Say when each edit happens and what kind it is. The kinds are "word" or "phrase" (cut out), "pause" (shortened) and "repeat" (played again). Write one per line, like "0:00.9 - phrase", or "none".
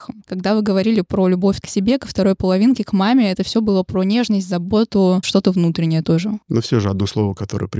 0:06.4 - pause